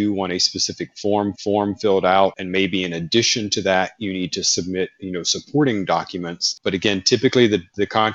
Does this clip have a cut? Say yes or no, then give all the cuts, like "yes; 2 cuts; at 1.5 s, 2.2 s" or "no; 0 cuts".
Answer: yes; 1 cut; at 1.3 s